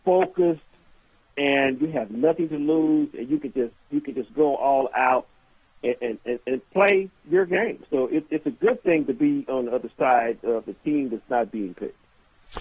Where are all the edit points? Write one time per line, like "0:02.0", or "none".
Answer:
none